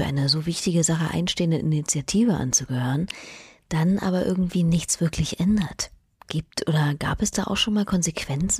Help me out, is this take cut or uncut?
uncut